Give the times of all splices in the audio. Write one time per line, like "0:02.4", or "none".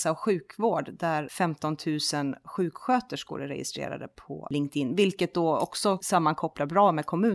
none